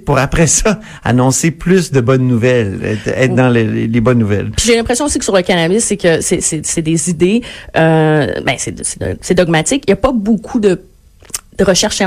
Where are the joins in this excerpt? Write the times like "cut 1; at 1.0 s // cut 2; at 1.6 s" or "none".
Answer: none